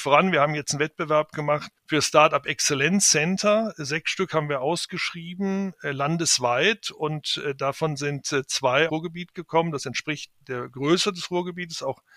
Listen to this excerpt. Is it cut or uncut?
cut